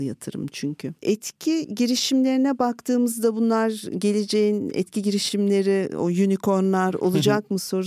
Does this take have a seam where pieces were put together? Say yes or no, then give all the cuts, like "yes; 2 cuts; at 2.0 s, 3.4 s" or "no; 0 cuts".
yes; 1 cut; at 1.0 s